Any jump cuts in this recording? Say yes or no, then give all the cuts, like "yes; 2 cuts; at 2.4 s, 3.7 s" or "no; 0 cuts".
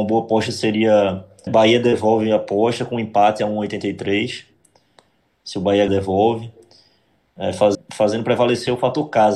yes; 3 cuts; at 1.5 s, 5.9 s, 7.7 s